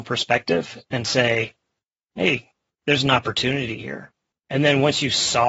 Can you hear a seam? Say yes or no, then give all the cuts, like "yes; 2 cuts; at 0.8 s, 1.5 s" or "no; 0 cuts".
no; 0 cuts